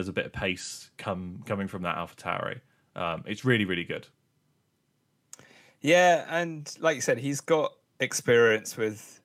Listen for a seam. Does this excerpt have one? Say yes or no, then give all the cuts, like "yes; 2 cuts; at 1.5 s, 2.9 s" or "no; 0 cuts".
no; 0 cuts